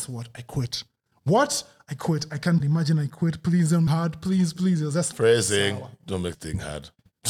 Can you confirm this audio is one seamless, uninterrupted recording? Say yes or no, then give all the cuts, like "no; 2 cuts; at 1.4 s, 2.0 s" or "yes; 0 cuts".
no; 4 cuts; at 2.6 s, 3.9 s, 5.1 s, 6.3 s